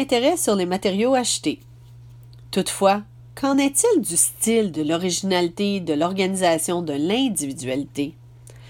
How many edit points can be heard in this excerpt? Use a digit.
0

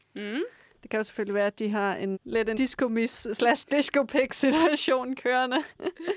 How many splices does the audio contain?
2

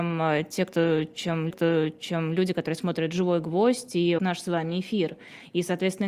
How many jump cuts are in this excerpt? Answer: 2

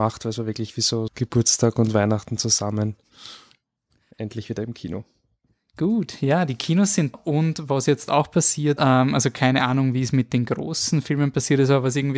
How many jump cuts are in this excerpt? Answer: 3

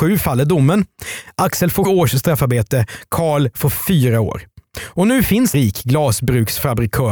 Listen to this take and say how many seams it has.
2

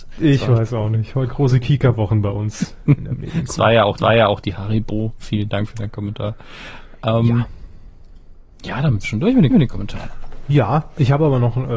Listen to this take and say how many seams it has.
4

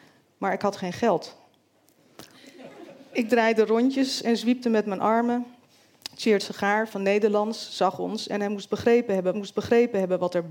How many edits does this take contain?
1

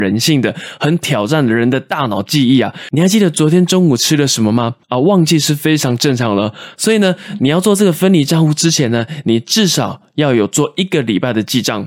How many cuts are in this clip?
1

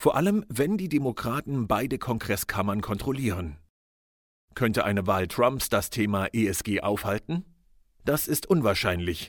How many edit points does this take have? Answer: 1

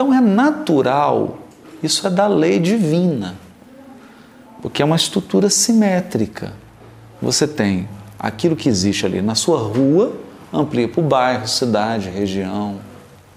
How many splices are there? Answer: 0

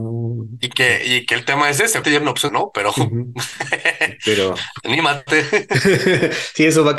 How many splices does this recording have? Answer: 2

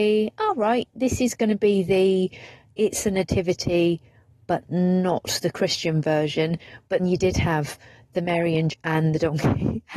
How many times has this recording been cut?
2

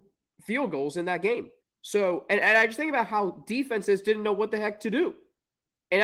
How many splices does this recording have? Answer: 1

